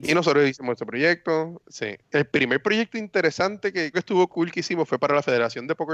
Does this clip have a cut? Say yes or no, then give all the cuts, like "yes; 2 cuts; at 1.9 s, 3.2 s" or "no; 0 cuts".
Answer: yes; 2 cuts; at 2.0 s, 3.9 s